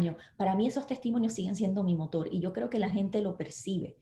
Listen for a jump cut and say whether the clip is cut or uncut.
uncut